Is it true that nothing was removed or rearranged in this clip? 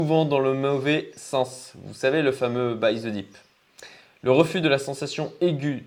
yes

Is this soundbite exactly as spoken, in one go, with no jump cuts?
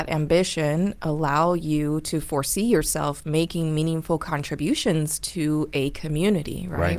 yes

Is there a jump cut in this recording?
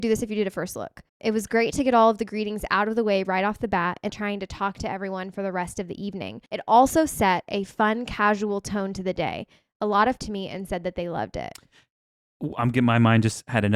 yes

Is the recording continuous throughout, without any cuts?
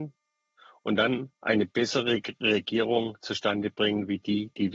no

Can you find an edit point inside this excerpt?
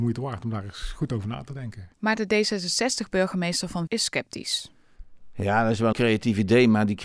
yes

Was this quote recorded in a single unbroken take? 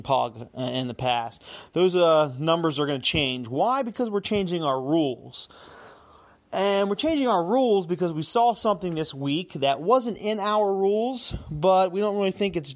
yes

